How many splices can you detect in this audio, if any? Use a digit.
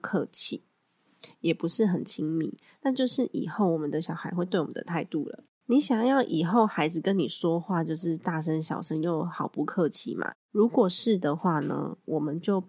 0